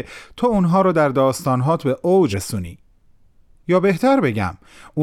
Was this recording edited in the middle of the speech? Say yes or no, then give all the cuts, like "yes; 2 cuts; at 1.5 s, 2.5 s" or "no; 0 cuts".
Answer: yes; 1 cut; at 2.3 s